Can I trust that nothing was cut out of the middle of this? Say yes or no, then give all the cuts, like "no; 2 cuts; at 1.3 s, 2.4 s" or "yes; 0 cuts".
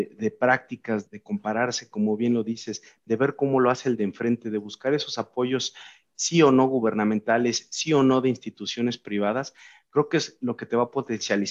no; 1 cut; at 1.1 s